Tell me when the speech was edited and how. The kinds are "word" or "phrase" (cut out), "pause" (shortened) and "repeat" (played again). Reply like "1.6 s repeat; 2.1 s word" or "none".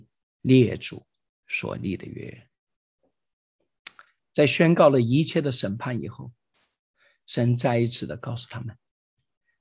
none